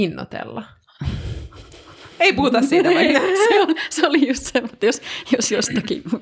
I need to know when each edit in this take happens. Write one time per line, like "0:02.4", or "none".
none